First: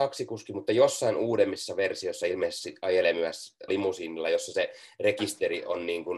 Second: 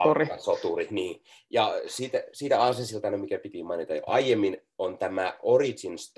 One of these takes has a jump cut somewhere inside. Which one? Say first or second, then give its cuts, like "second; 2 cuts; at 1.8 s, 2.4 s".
first; 1 cut; at 3.7 s